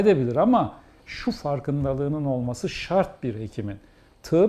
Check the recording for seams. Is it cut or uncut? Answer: uncut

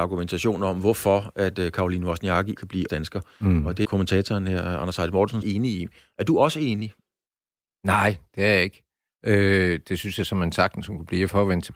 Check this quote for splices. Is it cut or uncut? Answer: cut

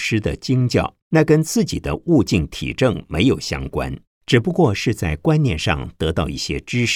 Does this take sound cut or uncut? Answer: cut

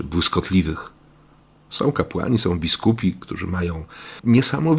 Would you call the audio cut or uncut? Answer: uncut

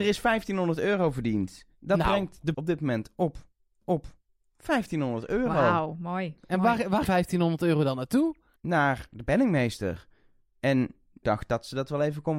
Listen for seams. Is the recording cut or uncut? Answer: cut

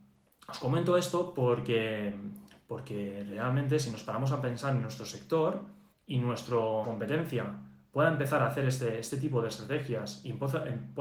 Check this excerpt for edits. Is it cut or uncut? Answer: cut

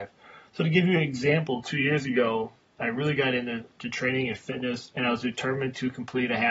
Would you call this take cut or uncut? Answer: uncut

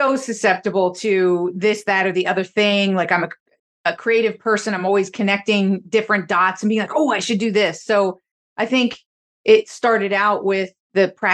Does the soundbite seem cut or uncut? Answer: uncut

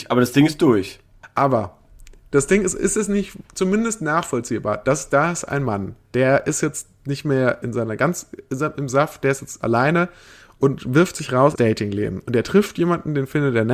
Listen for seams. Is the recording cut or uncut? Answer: cut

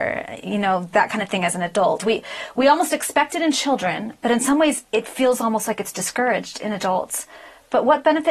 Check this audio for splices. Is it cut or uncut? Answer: uncut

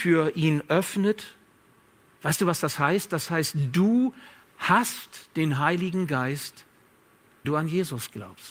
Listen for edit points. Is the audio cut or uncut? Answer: cut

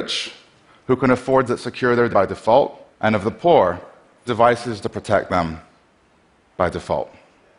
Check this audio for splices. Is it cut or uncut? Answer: cut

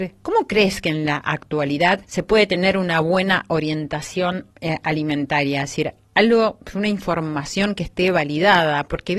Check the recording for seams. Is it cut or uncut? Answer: cut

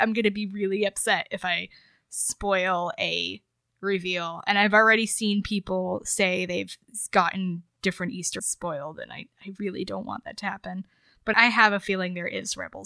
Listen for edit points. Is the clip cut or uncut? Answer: cut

